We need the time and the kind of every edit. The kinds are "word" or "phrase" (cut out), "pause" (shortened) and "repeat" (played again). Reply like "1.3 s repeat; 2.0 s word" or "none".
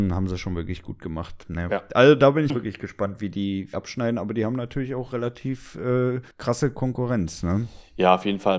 2.5 s word; 3.7 s phrase; 6.3 s pause